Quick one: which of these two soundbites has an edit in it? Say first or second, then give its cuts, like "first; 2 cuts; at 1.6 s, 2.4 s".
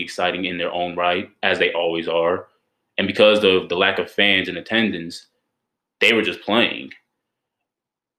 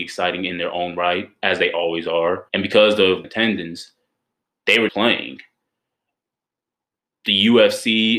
second; 3 cuts; at 2.5 s, 3.2 s, 4.9 s